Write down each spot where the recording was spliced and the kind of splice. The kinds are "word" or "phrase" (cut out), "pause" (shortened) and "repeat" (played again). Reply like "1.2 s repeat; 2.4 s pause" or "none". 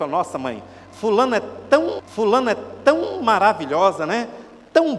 2.0 s repeat